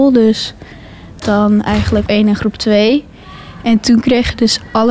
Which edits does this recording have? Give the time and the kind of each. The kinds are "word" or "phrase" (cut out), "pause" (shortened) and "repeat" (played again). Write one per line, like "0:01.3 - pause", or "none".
0:01.2 - phrase
0:02.1 - word